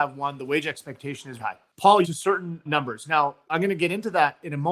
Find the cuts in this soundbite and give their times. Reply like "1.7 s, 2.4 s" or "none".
1.4 s, 2.0 s